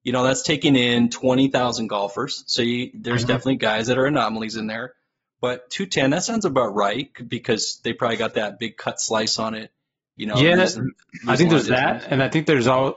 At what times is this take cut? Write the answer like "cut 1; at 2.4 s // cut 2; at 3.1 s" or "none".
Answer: none